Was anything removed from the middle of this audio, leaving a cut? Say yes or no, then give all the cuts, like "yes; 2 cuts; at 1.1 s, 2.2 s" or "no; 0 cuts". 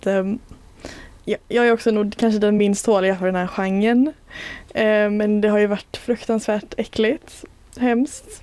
no; 0 cuts